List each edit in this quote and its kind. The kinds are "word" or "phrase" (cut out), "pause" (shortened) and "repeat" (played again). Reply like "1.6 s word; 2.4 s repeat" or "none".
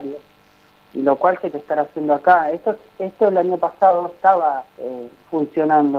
1.5 s word; 4.7 s pause